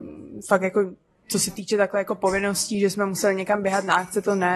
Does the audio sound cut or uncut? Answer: uncut